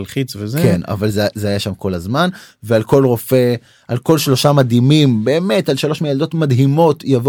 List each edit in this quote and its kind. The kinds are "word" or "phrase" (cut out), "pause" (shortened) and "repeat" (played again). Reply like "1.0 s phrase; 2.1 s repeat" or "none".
none